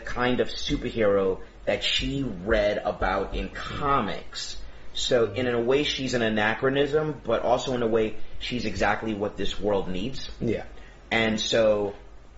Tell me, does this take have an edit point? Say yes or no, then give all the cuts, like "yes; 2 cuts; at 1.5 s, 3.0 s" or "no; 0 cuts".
no; 0 cuts